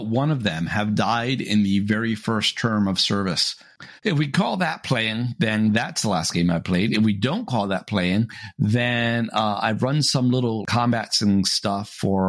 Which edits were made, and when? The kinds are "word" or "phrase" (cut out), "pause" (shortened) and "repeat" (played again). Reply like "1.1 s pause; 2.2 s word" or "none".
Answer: 4.0 s pause